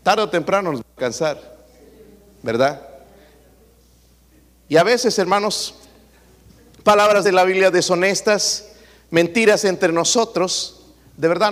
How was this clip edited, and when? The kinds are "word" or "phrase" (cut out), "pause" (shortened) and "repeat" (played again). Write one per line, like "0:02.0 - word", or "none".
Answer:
0:07.2 - word